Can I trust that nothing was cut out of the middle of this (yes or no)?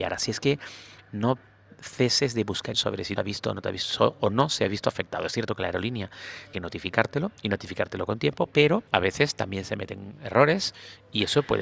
no